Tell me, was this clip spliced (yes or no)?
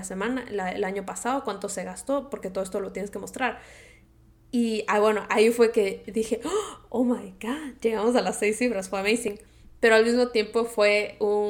no